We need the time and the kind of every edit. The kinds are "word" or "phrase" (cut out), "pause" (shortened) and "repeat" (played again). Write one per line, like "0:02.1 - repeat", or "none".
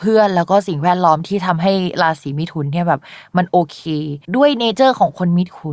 0:04.2 - pause